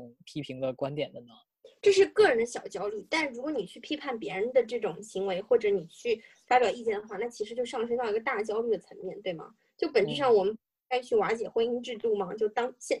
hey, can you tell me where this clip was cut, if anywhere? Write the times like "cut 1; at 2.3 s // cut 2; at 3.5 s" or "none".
none